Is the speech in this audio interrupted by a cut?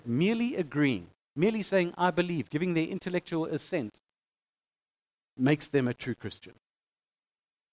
no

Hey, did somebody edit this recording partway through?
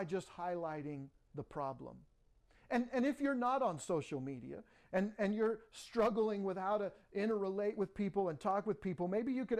no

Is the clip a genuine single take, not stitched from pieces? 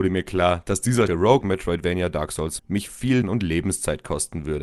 no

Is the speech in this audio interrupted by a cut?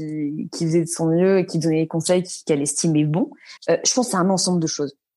yes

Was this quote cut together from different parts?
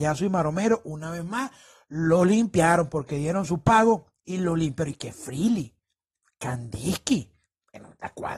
no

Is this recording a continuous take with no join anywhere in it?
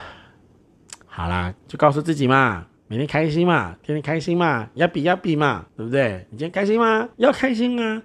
no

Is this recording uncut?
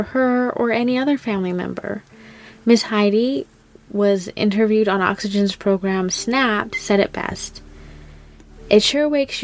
yes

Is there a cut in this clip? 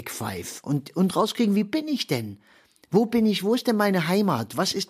no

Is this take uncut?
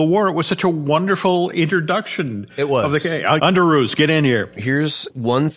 no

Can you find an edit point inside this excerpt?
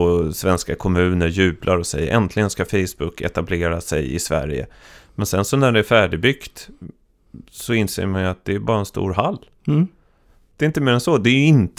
no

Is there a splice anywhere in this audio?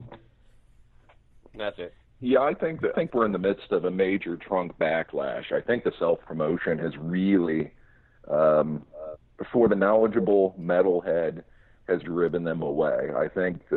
yes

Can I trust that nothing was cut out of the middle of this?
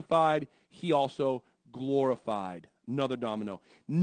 yes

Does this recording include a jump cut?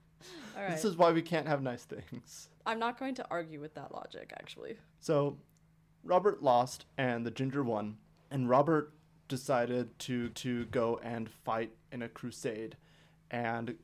yes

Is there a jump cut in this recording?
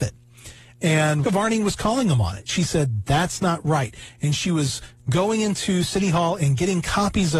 yes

